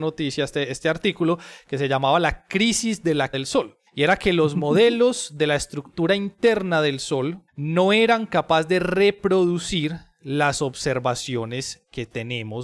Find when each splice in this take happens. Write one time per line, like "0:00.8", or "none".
0:03.3
0:03.9
0:07.5